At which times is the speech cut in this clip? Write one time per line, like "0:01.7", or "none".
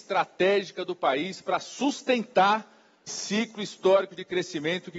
0:03.1

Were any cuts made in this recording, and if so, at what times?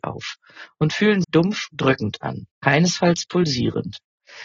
0:01.2
0:01.7
0:02.5

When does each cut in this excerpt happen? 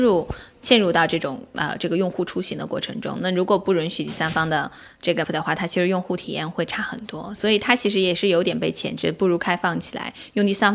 0:05.2

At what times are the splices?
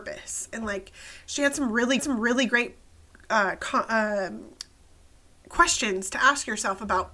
0:02.0

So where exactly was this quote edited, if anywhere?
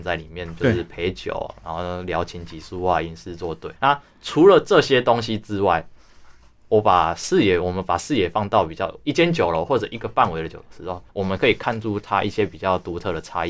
0:03.8
0:11.1

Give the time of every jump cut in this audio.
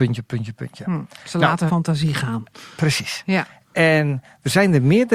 0:01.7

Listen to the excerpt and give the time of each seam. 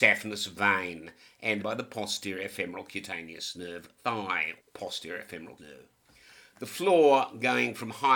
0:01.6
0:04.0
0:04.6
0:05.6

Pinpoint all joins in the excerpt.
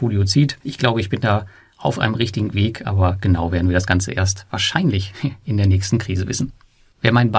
none

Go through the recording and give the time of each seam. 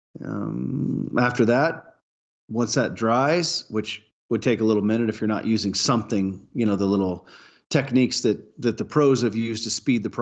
none

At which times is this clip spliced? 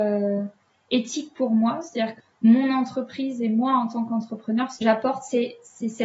0:04.8

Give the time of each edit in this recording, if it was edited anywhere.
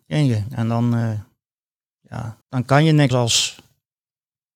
0:02.4
0:03.1

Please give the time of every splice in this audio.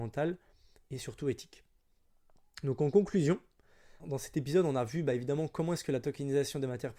0:04.0

